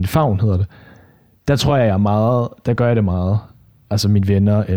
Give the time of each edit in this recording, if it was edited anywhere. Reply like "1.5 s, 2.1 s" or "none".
none